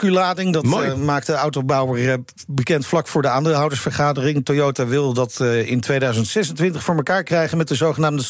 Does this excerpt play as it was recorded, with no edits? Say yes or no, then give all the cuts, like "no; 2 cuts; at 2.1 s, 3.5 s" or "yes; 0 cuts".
yes; 0 cuts